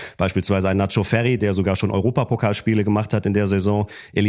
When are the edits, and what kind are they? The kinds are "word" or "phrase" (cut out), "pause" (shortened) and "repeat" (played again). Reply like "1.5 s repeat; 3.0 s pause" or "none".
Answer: none